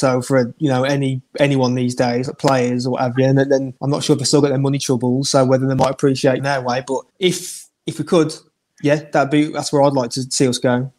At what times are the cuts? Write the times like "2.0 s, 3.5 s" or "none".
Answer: 3.8 s, 6.4 s, 7.1 s